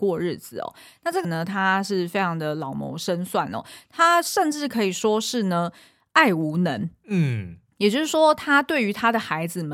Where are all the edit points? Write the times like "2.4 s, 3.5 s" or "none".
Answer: 1.2 s